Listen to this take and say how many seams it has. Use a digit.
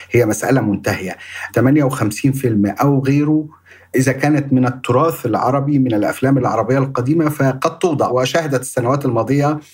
0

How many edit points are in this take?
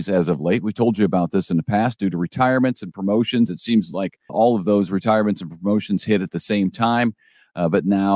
1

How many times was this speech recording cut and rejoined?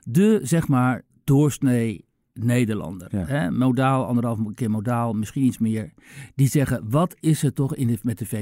0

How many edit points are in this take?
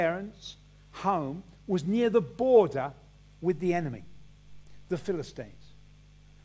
0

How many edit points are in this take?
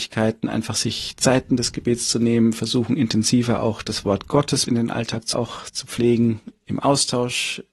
2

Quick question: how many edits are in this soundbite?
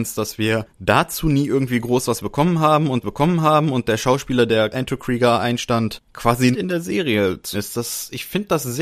4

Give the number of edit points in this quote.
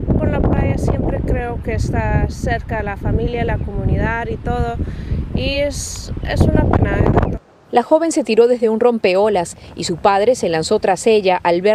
0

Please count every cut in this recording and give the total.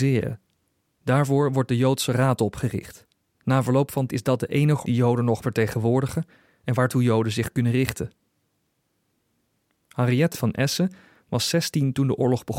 4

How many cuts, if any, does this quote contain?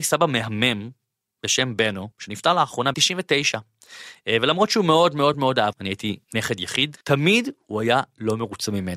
6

